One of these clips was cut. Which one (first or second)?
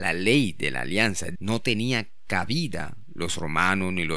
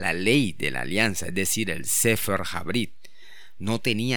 first